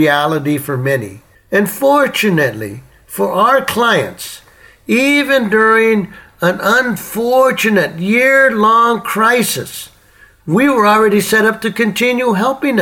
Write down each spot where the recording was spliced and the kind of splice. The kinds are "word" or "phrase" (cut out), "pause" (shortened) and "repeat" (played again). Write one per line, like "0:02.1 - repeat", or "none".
none